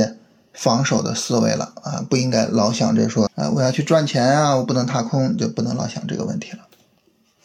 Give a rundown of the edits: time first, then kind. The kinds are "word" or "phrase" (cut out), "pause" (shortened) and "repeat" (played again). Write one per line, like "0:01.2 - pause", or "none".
0:03.3 - word